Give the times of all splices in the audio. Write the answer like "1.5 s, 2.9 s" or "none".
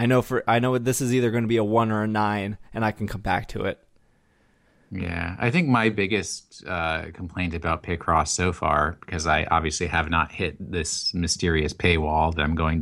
none